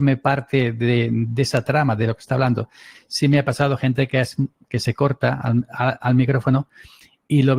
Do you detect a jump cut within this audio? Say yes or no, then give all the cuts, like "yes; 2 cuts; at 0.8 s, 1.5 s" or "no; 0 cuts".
no; 0 cuts